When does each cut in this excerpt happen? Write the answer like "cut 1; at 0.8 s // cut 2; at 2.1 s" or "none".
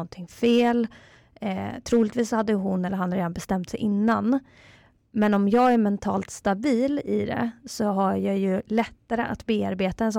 none